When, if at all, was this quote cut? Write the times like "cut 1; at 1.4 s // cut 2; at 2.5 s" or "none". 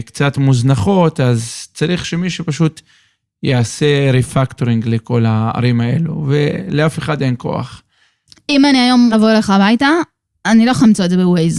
cut 1; at 9.1 s